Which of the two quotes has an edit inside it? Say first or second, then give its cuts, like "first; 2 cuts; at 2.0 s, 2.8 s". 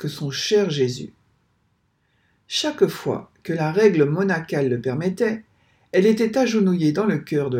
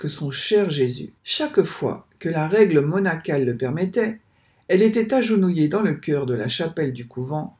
second; 1 cut; at 1.2 s